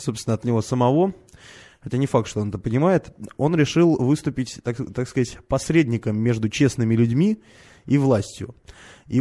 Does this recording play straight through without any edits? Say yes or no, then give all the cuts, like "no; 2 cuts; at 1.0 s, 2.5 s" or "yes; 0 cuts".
yes; 0 cuts